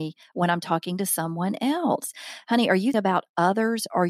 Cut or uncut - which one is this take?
cut